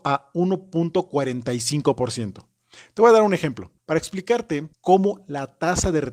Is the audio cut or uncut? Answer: cut